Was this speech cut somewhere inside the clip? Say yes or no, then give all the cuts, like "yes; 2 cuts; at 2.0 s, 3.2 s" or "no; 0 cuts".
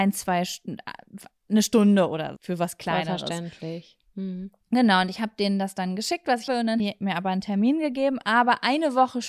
yes; 3 cuts; at 2.4 s, 6.5 s, 6.8 s